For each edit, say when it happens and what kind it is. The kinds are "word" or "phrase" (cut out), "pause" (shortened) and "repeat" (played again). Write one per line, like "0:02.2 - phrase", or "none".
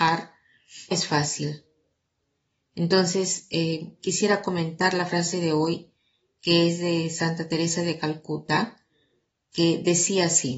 0:00.9 - word